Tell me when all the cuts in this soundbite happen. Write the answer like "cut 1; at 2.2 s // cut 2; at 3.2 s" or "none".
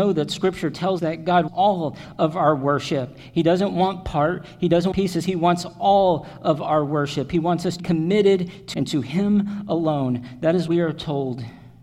cut 1; at 1.0 s // cut 2; at 1.5 s // cut 3; at 4.9 s // cut 4; at 7.8 s // cut 5; at 8.7 s // cut 6; at 10.7 s